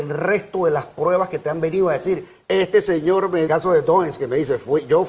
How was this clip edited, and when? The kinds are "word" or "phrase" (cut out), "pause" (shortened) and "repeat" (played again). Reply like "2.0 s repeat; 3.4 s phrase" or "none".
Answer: 3.5 s phrase